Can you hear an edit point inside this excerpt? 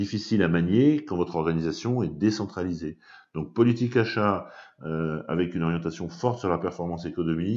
no; 0 cuts

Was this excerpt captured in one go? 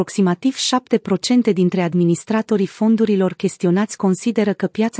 yes; 0 cuts

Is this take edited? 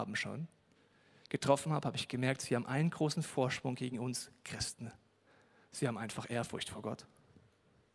no; 0 cuts

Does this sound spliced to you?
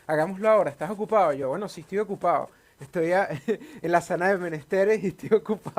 no; 0 cuts

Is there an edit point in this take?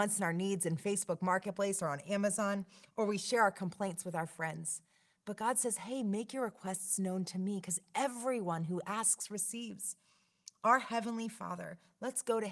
no; 0 cuts

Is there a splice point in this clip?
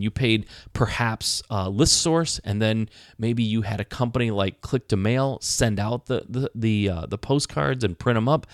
no; 0 cuts

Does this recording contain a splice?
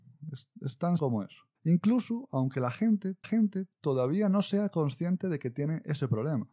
yes; 3 cuts; at 1.0 s, 1.6 s, 3.2 s

